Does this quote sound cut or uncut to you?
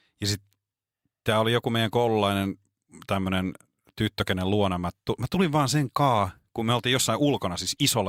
uncut